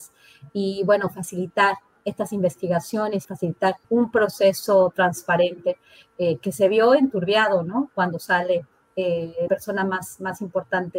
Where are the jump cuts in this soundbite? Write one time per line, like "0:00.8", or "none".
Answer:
0:03.2
0:03.8
0:09.5